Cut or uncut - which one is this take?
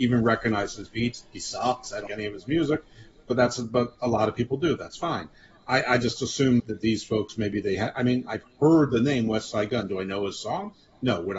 cut